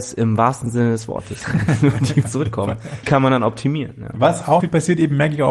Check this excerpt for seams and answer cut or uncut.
cut